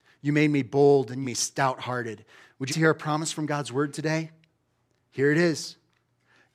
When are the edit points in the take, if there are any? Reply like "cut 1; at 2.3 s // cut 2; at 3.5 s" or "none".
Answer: cut 1; at 1.2 s // cut 2; at 2.7 s